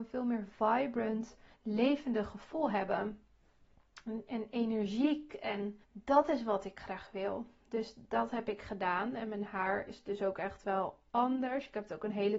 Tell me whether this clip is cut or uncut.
cut